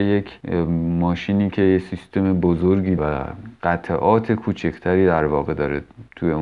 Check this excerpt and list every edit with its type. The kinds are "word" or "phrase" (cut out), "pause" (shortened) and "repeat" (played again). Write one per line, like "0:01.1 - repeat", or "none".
0:03.0 - word